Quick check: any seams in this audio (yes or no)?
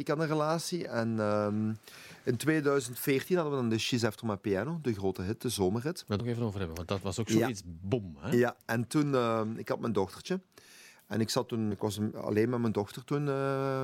yes